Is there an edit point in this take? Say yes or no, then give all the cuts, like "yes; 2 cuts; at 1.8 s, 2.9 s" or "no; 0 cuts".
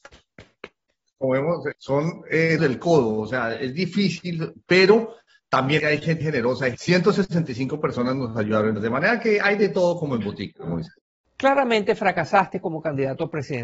yes; 4 cuts; at 1.7 s, 2.6 s, 5.8 s, 6.2 s